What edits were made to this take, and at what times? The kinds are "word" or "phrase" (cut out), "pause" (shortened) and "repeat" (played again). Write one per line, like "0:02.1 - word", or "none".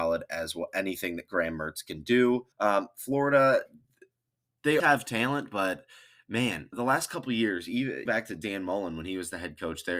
0:02.5 - pause
0:04.8 - word
0:06.7 - word
0:08.1 - word